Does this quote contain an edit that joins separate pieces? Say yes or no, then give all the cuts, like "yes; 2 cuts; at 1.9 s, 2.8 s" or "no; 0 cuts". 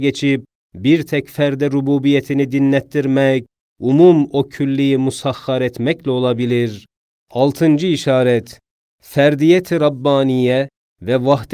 no; 0 cuts